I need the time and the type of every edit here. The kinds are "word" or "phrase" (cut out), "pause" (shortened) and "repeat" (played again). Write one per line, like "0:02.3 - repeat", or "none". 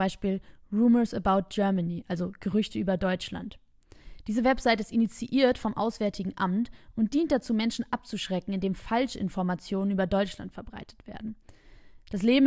none